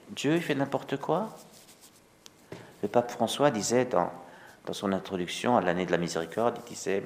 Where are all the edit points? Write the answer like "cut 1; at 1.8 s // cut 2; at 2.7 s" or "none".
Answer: none